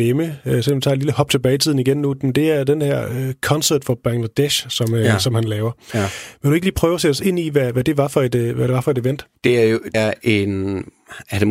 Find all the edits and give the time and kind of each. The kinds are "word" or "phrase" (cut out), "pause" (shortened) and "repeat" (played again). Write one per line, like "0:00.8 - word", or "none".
0:09.9 - word